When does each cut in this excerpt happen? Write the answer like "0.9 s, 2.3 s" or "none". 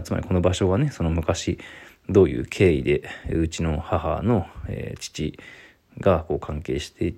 none